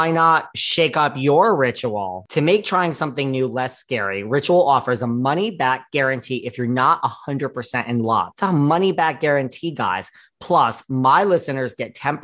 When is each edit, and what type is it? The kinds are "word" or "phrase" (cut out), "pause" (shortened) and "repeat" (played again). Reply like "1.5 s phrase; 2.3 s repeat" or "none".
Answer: none